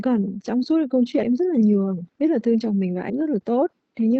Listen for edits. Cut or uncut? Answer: cut